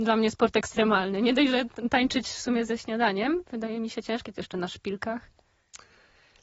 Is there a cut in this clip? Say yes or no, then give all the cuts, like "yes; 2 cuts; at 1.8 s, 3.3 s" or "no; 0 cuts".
no; 0 cuts